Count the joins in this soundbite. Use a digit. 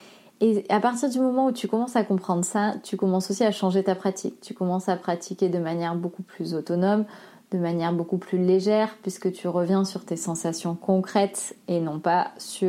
0